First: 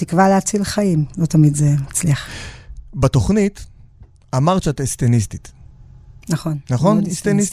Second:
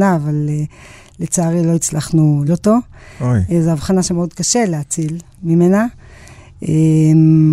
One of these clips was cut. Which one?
second; 1 cut; at 2.5 s

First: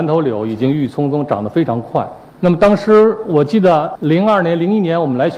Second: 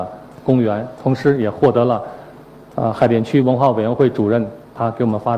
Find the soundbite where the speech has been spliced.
first; 2 cuts; at 2.3 s, 4.0 s

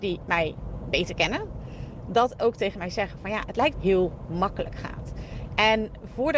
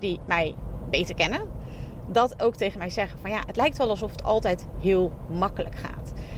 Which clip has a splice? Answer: first; 1 cut; at 3.7 s

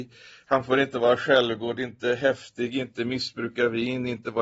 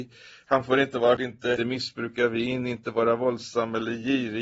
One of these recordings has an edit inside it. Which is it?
second; 2 cuts; at 1.2 s, 1.6 s

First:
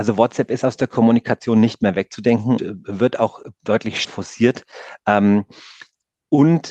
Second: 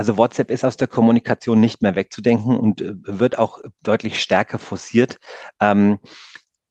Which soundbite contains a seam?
first; 2 cuts; at 2.6 s, 4.0 s

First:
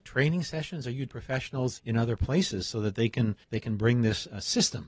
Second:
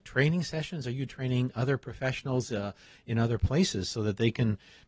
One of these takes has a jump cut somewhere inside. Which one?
first; 3 cuts; at 1.1 s, 1.8 s, 3.4 s

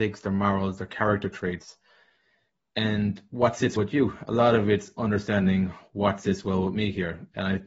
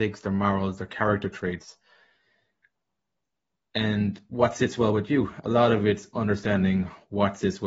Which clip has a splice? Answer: first; 2 cuts; at 2.5 s, 3.8 s

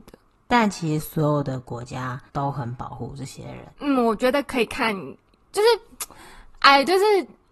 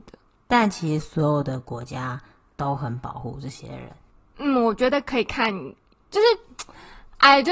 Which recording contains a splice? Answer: first; 2 cuts; at 2.3 s, 3.7 s

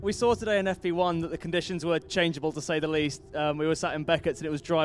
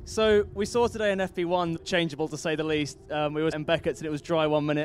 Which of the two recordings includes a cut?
second; 2 cuts; at 1.8 s, 3.5 s

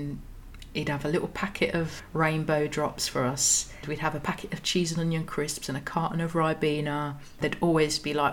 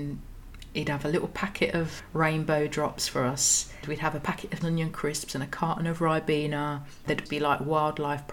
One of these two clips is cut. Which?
second; 2 cuts; at 4.6 s, 7.3 s

